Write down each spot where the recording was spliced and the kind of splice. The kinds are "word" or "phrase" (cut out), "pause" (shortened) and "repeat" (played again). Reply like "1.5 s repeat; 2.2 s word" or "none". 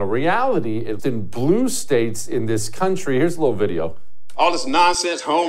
1.0 s word